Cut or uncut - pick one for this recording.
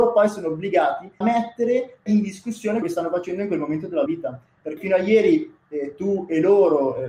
cut